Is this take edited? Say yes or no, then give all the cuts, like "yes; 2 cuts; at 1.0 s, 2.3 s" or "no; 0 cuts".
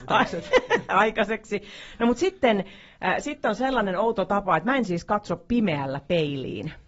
no; 0 cuts